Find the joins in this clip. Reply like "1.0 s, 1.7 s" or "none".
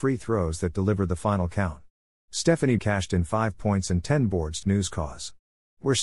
2.8 s, 4.6 s